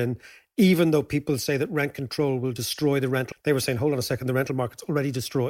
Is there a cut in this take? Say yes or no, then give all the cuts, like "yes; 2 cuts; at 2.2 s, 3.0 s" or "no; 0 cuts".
yes; 1 cut; at 3.3 s